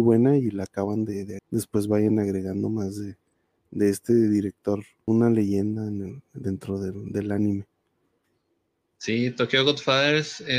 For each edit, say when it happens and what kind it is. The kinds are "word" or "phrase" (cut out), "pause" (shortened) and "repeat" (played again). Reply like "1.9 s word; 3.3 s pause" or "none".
1.4 s phrase; 5.1 s phrase